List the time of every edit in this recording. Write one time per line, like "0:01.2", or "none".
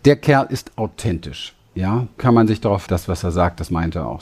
0:02.2
0:02.9